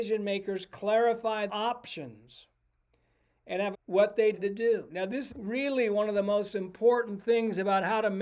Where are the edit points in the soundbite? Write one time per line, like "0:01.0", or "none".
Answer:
0:01.5
0:03.7
0:04.3
0:05.3